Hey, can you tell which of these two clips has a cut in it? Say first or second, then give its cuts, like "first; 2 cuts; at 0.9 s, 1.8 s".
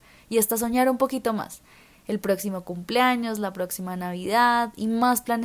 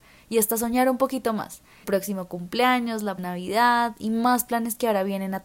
second; 2 cuts; at 1.8 s, 3.2 s